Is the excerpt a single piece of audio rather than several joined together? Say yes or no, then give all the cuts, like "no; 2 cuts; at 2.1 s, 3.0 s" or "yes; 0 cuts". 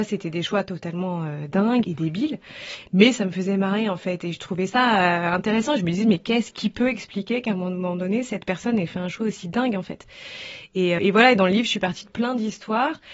no; 2 cuts; at 1.8 s, 11.0 s